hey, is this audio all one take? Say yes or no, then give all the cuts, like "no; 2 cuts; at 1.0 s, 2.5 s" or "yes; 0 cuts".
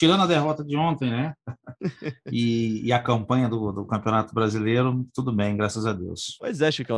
yes; 0 cuts